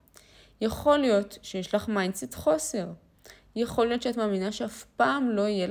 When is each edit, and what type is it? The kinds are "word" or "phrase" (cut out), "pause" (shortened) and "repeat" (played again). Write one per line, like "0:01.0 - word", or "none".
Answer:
none